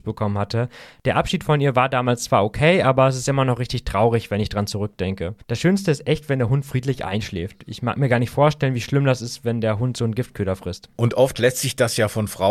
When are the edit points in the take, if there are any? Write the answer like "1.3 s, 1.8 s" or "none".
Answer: 5.4 s